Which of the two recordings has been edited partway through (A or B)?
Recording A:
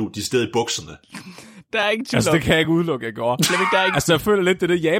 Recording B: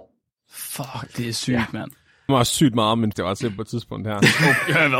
B